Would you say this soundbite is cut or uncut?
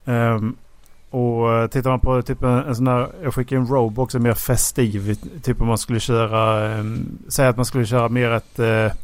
uncut